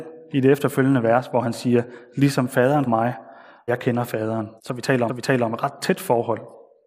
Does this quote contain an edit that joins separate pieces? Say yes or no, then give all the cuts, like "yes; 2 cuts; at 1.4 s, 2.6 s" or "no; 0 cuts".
yes; 4 cuts; at 2.9 s, 3.7 s, 4.6 s, 5.1 s